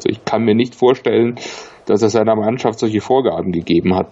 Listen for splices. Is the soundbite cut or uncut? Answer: uncut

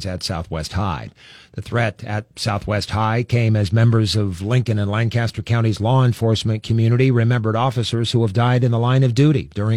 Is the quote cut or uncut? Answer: uncut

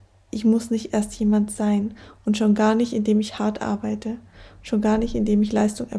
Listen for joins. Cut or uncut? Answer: uncut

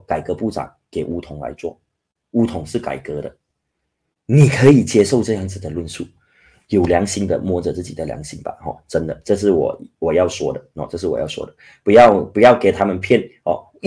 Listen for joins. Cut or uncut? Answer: uncut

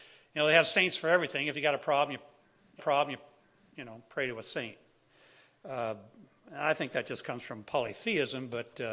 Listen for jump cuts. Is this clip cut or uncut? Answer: cut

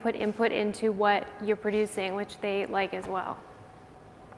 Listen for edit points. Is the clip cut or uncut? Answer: uncut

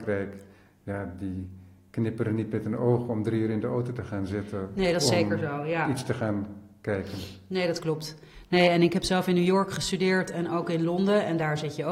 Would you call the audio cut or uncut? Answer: uncut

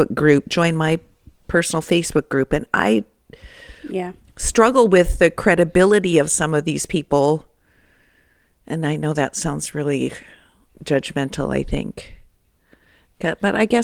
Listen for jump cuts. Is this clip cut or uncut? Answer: uncut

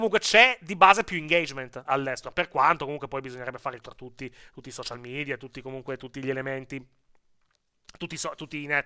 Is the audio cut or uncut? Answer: cut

